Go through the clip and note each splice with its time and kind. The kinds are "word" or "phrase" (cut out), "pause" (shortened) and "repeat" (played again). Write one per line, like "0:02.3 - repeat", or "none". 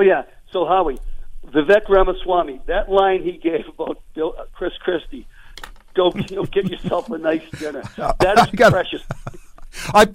none